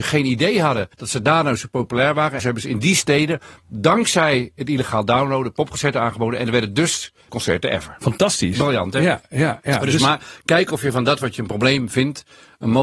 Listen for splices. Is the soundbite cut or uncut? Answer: cut